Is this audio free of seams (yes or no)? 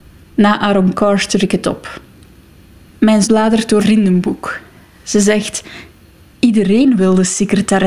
no